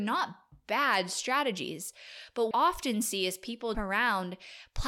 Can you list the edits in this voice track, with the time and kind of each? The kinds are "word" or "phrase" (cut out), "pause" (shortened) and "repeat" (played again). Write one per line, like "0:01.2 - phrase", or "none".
0:02.5 - phrase
0:03.7 - word